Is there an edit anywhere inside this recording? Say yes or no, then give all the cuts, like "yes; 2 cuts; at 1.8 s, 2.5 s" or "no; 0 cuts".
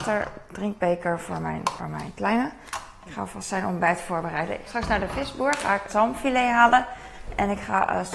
yes; 3 cuts; at 1.8 s, 4.7 s, 5.9 s